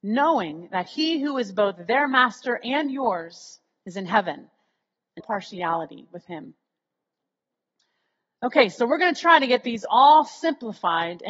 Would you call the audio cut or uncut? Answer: cut